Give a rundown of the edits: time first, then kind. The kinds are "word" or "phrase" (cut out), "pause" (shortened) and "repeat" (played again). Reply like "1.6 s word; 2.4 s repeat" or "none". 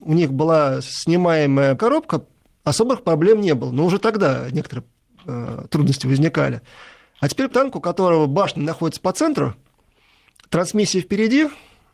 1.8 s word; 7.5 s word